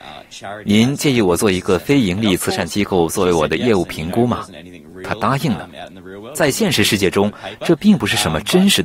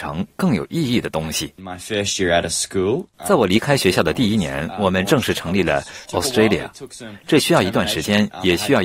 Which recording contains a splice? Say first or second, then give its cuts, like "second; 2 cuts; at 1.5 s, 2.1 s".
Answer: second; 1 cut; at 6.0 s